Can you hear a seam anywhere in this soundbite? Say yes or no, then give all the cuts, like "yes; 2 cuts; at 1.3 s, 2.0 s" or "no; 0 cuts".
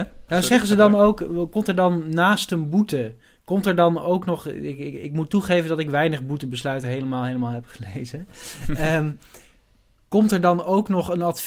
no; 0 cuts